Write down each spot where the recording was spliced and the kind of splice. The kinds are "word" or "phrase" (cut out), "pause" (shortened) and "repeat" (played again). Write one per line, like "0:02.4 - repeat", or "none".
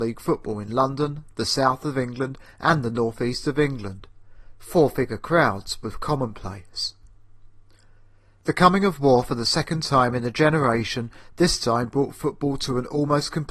none